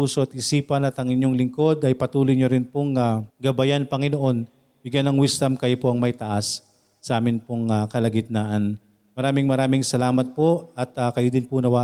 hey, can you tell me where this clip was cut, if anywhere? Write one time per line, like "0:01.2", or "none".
0:03.3